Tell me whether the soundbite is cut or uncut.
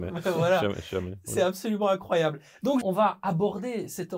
cut